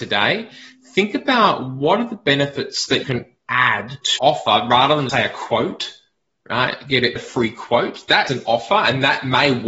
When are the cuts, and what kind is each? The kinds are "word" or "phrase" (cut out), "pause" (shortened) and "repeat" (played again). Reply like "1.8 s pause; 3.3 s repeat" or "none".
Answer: 3.0 s word; 4.2 s word; 5.1 s word; 7.2 s word; 8.3 s word

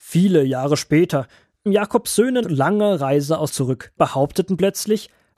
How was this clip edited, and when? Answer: 1.7 s word; 2.4 s word; 3.5 s word; 4.0 s word

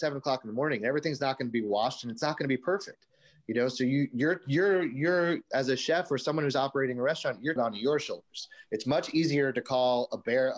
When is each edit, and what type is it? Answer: 7.6 s phrase

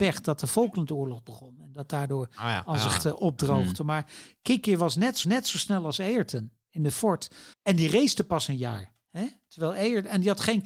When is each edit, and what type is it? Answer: 3.0 s word; 5.2 s repeat; 6.9 s word; 7.5 s pause

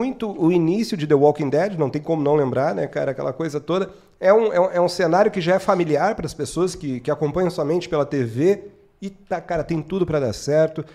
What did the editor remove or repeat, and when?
none

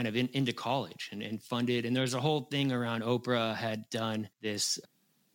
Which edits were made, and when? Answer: 4.3 s pause

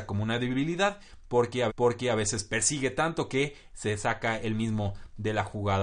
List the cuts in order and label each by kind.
1.7 s repeat

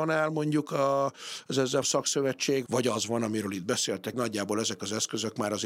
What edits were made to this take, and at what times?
1.8 s word; 2.7 s word; 4.1 s phrase

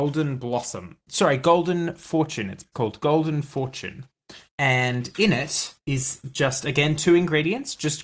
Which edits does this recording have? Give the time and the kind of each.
2.7 s word; 4.5 s pause; 5.8 s pause

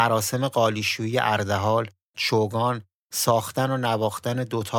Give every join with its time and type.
none

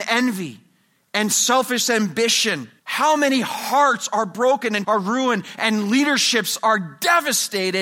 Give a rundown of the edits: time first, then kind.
2.8 s pause; 4.8 s word

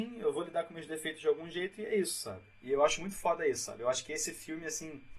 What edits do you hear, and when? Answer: none

